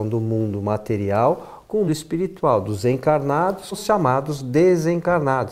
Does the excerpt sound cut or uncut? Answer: cut